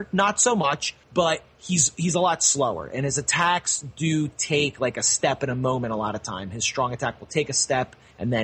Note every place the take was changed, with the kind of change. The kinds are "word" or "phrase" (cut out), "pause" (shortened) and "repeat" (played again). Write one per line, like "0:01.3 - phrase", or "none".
0:01.0 - pause